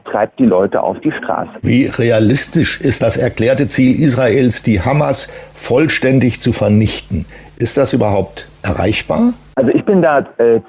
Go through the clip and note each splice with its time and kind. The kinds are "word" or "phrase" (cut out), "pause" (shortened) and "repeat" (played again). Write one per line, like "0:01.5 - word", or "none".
0:03.0 - word

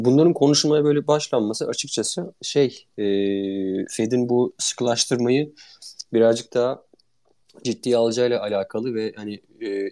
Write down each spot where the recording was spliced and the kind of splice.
none

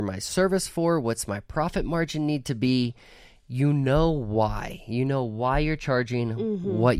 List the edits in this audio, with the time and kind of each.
none

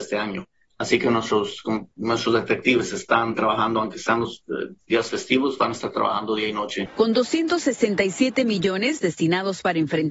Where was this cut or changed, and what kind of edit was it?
0:01.9 - pause

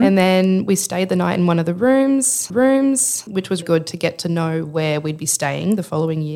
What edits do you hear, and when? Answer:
0:02.5 - repeat
0:03.6 - word

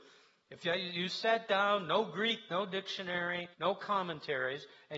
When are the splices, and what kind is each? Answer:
0:03.5 - pause

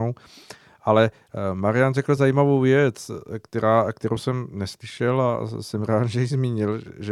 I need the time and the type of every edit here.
none

